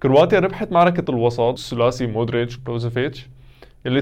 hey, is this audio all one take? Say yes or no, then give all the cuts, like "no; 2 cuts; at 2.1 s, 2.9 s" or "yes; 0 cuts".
no; 3 cuts; at 1.0 s, 1.6 s, 2.6 s